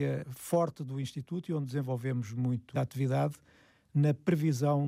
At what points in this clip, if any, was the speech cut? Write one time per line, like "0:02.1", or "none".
0:02.7